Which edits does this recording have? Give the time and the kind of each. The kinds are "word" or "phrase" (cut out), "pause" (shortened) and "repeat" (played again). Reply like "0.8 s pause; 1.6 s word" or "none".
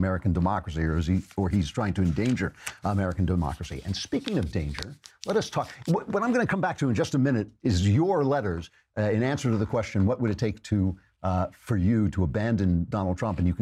none